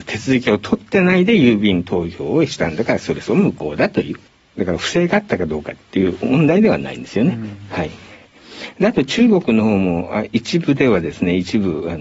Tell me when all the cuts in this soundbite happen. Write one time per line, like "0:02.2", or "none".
0:04.3